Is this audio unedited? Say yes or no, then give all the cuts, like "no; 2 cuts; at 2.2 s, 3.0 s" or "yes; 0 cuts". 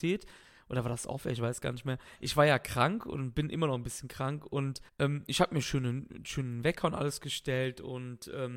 no; 1 cut; at 4.9 s